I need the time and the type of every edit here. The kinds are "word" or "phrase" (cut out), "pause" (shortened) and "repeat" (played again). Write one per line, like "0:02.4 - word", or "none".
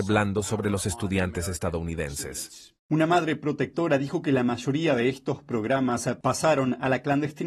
0:02.8 - pause